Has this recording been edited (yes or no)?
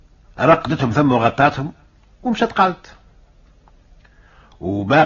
no